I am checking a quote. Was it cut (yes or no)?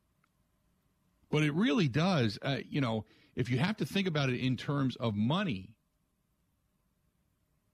no